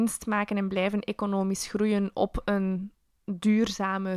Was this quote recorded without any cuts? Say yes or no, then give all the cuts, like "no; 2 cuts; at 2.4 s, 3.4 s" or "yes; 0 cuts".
yes; 0 cuts